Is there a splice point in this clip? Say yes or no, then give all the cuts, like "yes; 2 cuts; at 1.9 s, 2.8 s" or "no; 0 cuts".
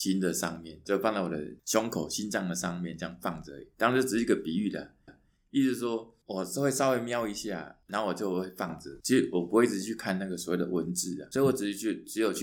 yes; 2 cuts; at 3.7 s, 5.1 s